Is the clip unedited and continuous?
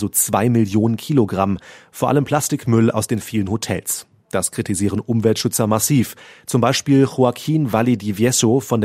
yes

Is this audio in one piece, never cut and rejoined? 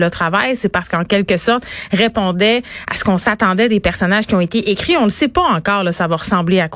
yes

